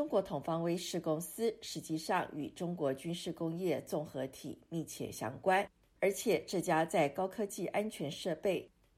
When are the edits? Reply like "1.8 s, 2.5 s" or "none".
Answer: none